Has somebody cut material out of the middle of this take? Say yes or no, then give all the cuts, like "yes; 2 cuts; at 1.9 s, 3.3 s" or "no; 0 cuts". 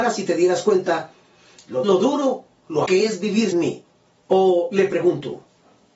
yes; 3 cuts; at 1.8 s, 2.9 s, 3.5 s